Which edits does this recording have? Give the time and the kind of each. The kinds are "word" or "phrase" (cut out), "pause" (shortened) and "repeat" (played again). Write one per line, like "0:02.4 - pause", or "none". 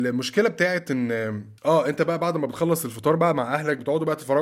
0:01.6 - pause